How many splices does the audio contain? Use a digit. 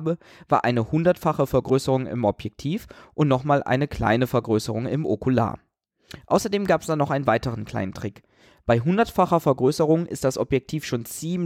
0